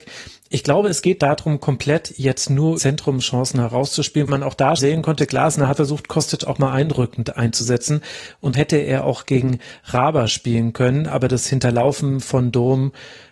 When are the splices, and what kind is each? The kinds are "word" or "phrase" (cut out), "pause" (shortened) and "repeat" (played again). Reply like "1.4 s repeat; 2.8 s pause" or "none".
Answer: 1.2 s word; 2.8 s word; 4.3 s word; 4.8 s word; 5.8 s word; 8.5 s word